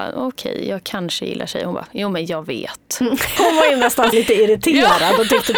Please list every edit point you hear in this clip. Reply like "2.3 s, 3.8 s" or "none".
3.4 s, 4.1 s